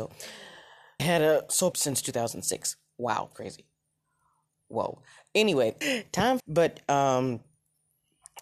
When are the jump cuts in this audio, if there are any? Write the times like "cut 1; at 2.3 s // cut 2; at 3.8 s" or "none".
cut 1; at 1.0 s // cut 2; at 1.7 s // cut 3; at 3.3 s // cut 4; at 5.8 s // cut 5; at 6.4 s